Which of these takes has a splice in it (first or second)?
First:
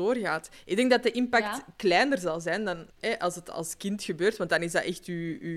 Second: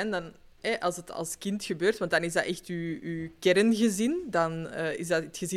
first